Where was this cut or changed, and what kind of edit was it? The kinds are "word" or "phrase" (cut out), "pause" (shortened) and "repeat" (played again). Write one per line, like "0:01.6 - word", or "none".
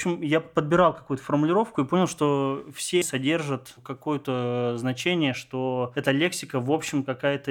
0:03.0 - word